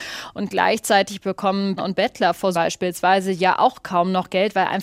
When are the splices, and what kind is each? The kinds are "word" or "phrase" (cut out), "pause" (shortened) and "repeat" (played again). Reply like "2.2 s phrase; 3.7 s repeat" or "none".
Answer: 1.8 s word; 2.5 s word

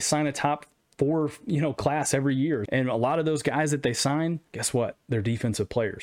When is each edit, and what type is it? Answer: 2.6 s word; 4.5 s pause

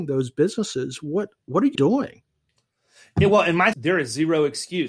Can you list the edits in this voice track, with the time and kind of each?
1.7 s word; 3.7 s phrase

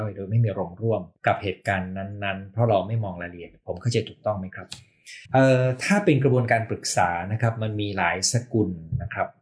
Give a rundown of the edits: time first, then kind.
1.1 s pause; 5.3 s pause

